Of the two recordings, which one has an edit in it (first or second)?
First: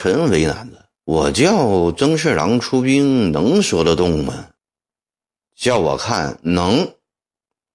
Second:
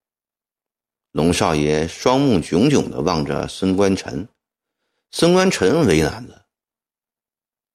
first